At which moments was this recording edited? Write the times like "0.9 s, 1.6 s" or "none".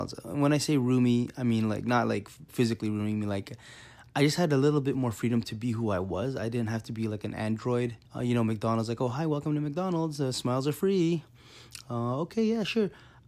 2.5 s, 8.1 s